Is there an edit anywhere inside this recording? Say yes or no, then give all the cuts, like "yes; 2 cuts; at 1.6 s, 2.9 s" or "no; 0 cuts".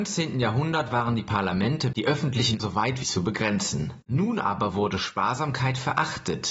yes; 4 cuts; at 1.9 s, 2.6 s, 3.0 s, 4.0 s